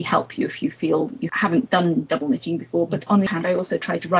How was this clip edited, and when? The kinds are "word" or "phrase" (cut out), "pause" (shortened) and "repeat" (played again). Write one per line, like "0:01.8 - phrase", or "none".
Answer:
0:03.3 - word

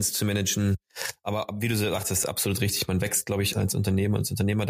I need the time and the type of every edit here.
0:03.5 - word

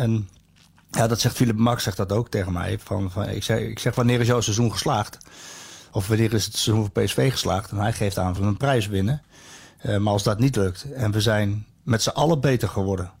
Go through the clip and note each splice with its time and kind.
0:08.4 - phrase

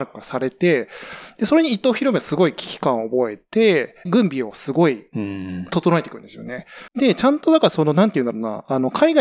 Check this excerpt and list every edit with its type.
0:04.1 - word
0:06.9 - pause

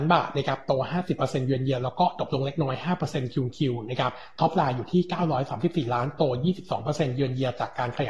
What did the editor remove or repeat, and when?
none

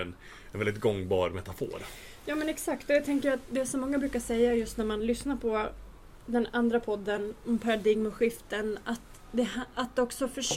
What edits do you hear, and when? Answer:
none

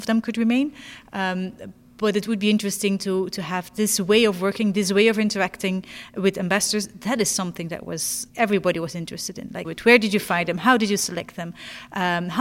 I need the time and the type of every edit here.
0:08.3 - pause
0:09.6 - phrase

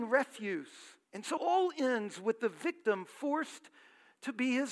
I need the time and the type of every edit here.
0:01.0 - pause
0:01.4 - word

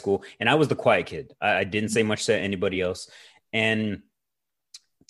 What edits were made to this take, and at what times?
none

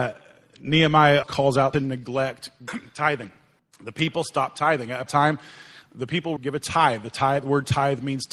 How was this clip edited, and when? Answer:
0:01.2 - word
0:01.7 - phrase
0:02.7 - word
0:03.6 - pause
0:05.1 - phrase
0:06.4 - phrase

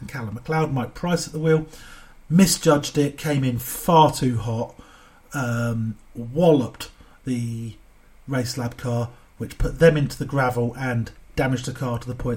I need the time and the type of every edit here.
none

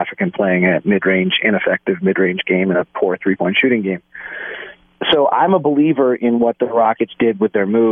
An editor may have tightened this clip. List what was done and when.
none

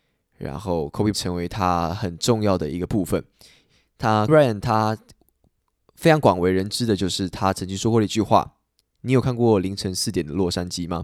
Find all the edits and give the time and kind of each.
0:01.1 - word
0:04.3 - word

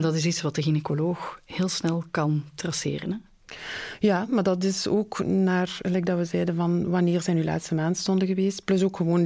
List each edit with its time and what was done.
none

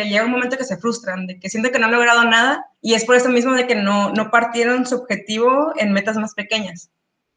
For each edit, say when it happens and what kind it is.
0:02.7 - pause

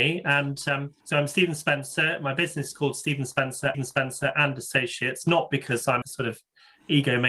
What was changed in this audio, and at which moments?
0:01.0 - pause
0:03.7 - repeat
0:06.0 - word

